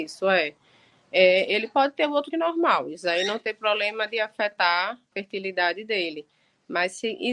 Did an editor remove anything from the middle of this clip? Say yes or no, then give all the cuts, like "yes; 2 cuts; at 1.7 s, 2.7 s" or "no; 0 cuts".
yes; 2 cuts; at 2.3 s, 5.1 s